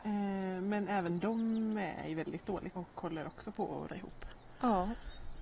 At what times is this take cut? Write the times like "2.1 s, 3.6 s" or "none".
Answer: 2.7 s, 3.9 s

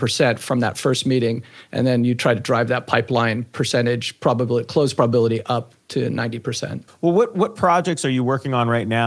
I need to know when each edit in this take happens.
6.9 s

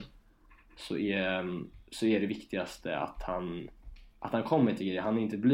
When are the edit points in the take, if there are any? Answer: none

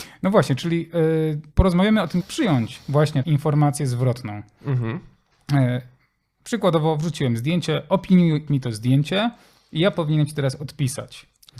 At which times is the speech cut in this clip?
1.5 s, 2.2 s, 3.2 s, 8.5 s

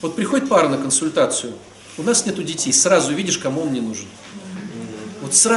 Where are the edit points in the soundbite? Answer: none

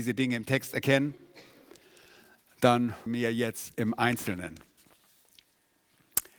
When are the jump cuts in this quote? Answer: 3.1 s

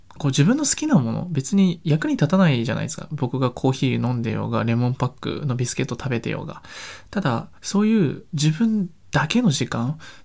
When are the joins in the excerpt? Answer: 7.6 s

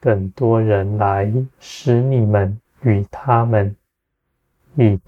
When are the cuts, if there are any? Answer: 1.5 s, 2.6 s

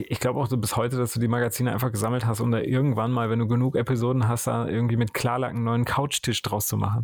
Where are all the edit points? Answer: none

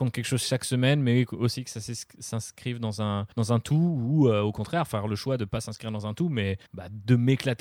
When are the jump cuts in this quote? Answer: 3.3 s, 6.7 s

